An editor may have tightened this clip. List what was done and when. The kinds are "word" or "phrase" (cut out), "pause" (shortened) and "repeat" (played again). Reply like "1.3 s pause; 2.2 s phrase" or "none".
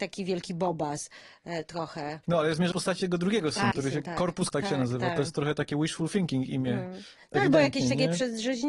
2.2 s pause; 2.7 s word; 3.7 s phrase; 4.5 s word